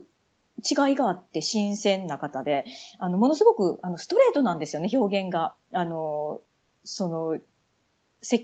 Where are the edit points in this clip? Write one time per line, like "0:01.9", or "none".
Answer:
0:05.6